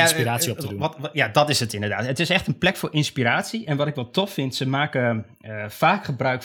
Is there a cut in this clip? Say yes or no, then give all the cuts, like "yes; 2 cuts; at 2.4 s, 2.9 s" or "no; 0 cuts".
no; 0 cuts